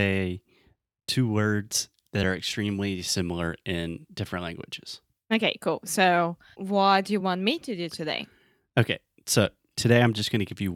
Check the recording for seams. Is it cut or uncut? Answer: uncut